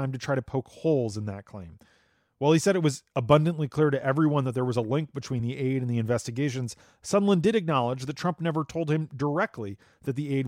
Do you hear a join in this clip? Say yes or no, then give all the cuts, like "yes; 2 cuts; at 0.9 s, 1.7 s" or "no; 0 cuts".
no; 0 cuts